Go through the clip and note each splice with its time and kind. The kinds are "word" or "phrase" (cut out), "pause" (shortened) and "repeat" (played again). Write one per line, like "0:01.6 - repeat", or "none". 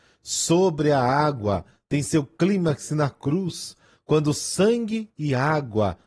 none